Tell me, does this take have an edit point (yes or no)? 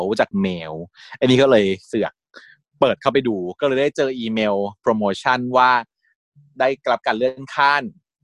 no